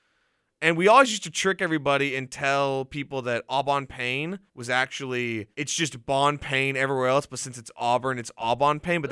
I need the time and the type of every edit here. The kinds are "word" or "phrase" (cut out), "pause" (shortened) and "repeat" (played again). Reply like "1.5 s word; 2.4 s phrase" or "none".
4.5 s pause; 5.5 s pause